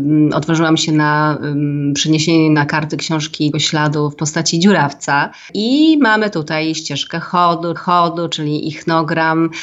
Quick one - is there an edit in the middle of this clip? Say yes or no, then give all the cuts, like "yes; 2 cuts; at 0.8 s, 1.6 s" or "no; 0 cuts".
yes; 2 cuts; at 3.5 s, 7.8 s